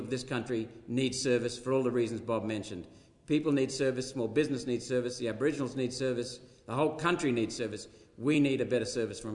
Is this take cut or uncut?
uncut